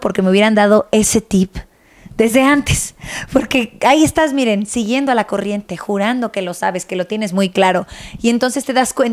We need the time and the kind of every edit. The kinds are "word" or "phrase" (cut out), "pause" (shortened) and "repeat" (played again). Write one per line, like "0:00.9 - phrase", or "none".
none